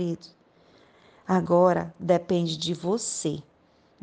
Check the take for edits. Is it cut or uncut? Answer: uncut